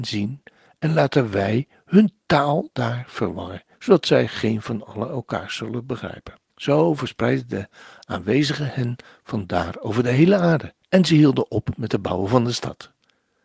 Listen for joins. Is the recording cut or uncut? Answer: cut